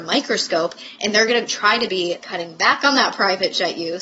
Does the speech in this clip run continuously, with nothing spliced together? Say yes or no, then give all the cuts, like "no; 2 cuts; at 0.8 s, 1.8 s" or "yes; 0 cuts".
no; 1 cut; at 2.2 s